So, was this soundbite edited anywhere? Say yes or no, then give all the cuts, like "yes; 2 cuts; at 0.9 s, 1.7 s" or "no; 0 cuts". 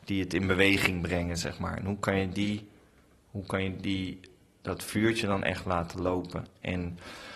no; 0 cuts